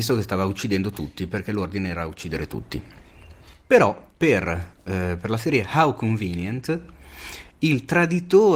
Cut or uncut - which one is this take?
uncut